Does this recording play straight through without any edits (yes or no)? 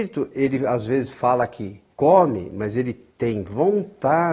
no